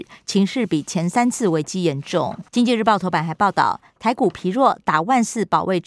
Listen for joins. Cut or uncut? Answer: cut